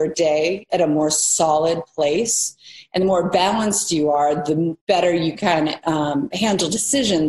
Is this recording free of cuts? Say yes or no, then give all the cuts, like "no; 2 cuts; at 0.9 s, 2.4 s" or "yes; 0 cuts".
no; 1 cut; at 4.8 s